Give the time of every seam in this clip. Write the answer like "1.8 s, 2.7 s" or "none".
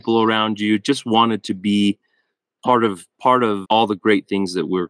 3.6 s